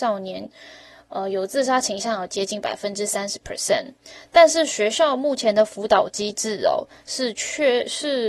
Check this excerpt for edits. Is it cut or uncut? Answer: uncut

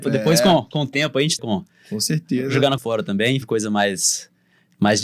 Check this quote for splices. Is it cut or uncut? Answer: cut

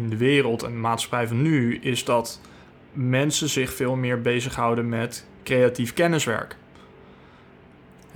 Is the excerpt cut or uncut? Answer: uncut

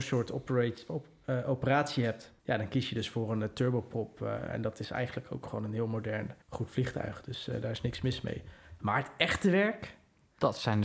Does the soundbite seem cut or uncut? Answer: cut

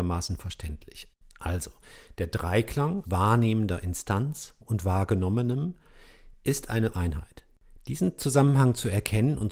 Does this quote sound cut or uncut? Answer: cut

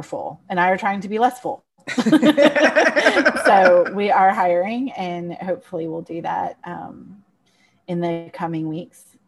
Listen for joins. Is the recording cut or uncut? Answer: uncut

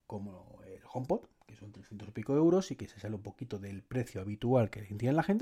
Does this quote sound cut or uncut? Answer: uncut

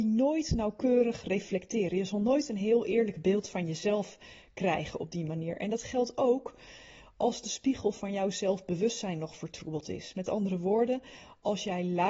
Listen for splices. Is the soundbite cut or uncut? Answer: uncut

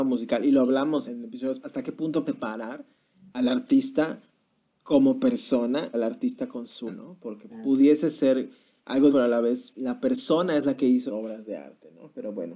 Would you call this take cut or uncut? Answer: cut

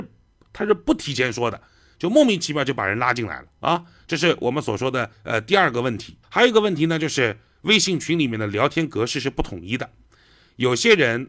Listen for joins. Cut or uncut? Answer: cut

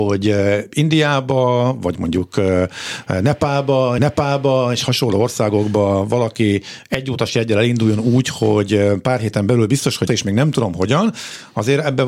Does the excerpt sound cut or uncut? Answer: cut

